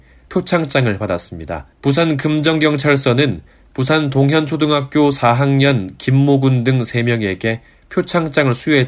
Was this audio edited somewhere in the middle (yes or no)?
yes